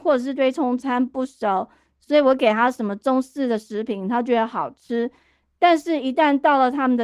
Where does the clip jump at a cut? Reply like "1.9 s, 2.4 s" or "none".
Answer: none